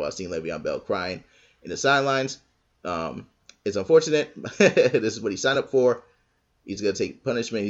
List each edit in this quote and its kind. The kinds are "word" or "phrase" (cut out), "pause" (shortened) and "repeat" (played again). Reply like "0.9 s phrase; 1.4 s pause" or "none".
none